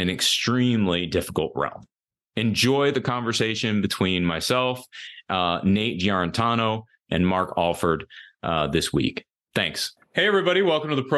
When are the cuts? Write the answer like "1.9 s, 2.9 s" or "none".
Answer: none